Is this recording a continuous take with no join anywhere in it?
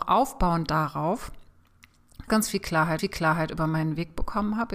no; 2 cuts; at 2.3 s, 3.0 s

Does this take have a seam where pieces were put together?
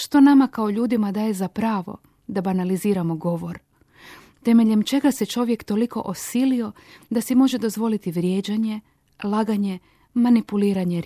no; 0 cuts

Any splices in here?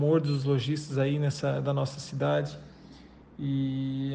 no; 0 cuts

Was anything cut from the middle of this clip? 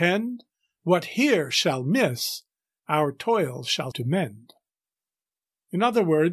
yes; 1 cut; at 3.9 s

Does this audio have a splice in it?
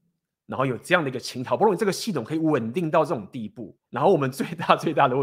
yes; 1 cut; at 3.8 s

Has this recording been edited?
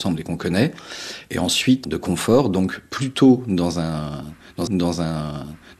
yes; 2 cuts; at 1.8 s, 4.7 s

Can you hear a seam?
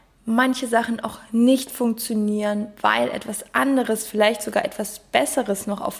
no; 0 cuts

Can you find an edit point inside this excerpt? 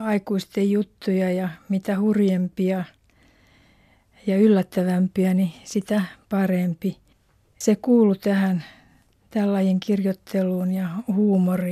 no; 0 cuts

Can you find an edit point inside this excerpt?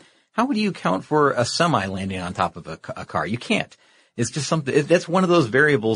no; 0 cuts

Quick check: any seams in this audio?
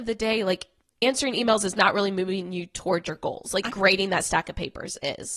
yes; 1 cut; at 3.7 s

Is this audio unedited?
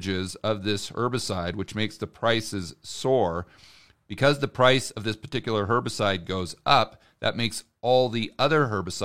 yes; 0 cuts

